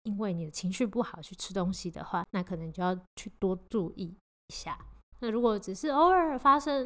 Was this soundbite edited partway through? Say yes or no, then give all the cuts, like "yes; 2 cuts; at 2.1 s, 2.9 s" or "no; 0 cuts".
yes; 1 cut; at 3.1 s